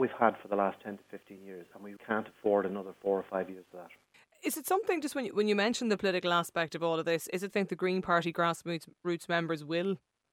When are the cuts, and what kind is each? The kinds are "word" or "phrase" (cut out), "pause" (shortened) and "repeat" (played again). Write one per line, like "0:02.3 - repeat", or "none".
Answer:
0:02.0 - word
0:04.1 - pause
0:07.5 - phrase

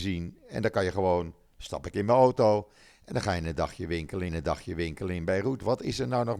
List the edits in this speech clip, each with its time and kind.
0:04.3 - repeat

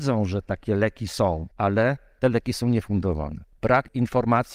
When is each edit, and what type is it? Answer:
0:01.5 - pause

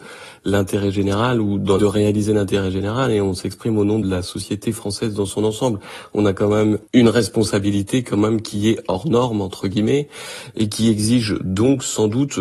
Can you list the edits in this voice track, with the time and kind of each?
0:01.8 - phrase
0:04.0 - word
0:06.9 - pause

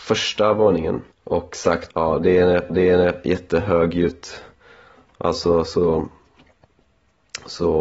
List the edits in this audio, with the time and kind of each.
0:01.1 - pause
0:01.9 - word
0:02.7 - repeat

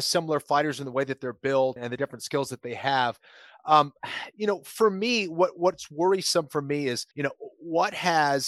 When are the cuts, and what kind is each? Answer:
0:01.8 - word
0:07.1 - pause

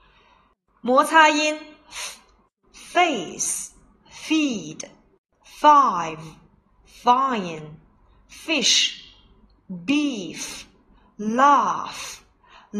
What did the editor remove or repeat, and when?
none

